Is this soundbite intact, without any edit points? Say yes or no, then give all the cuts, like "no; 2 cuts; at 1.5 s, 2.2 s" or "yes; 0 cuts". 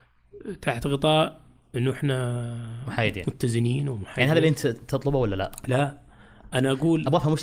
yes; 0 cuts